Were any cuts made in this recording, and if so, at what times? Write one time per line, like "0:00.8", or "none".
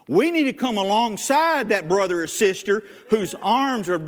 none